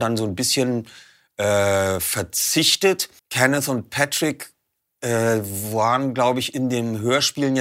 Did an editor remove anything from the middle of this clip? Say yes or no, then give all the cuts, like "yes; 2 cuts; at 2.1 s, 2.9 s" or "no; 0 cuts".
yes; 1 cut; at 3.2 s